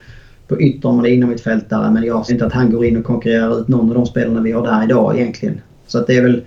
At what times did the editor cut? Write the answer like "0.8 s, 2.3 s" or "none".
1.0 s, 2.3 s